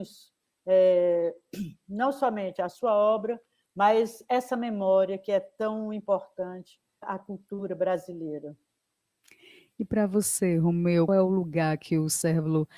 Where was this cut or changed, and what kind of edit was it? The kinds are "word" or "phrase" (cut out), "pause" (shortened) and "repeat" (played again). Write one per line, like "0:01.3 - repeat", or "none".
0:07.0 - word
0:11.1 - word